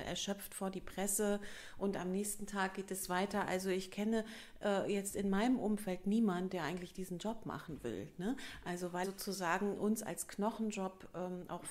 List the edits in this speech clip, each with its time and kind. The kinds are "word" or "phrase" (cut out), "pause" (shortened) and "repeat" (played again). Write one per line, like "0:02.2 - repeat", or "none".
0:09.0 - word